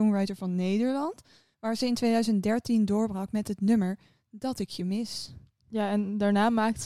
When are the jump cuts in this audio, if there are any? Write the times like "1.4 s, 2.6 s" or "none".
none